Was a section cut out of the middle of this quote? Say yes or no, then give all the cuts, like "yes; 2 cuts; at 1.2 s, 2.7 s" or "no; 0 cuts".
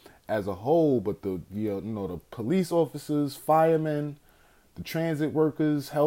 no; 0 cuts